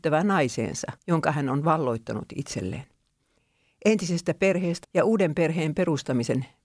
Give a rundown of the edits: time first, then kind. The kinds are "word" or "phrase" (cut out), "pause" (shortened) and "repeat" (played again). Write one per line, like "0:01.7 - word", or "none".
0:01.0 - pause
0:04.8 - word